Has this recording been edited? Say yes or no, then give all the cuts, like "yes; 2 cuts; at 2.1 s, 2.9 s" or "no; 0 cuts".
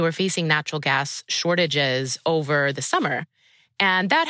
no; 0 cuts